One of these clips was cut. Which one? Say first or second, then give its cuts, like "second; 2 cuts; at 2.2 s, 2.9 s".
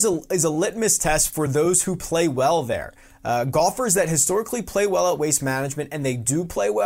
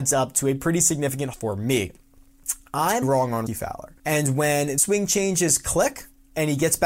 second; 5 cuts; at 1.3 s, 3.0 s, 3.5 s, 4.0 s, 4.8 s